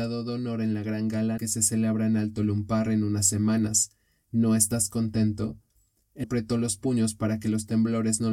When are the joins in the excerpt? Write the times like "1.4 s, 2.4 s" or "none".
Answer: 1.4 s, 6.2 s